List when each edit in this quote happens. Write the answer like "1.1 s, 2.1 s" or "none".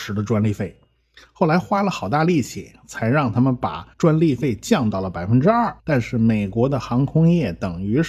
3.9 s, 5.8 s